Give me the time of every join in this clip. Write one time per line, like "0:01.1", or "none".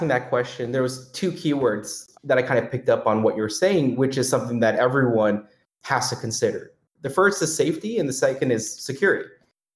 0:02.1

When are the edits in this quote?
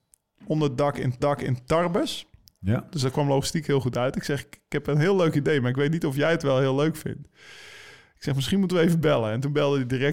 0:01.2

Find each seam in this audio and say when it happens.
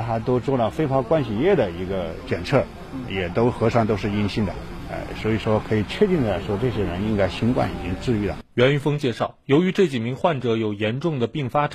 0:08.5

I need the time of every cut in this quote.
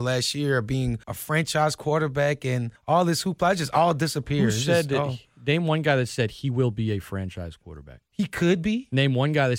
0:01.0
0:02.8
0:08.1

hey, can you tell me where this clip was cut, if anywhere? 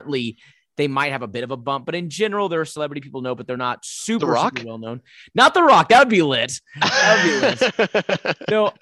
none

